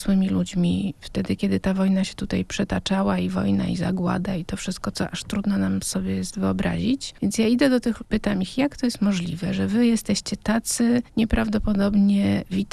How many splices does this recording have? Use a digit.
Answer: 2